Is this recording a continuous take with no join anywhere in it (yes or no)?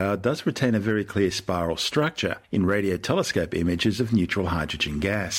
yes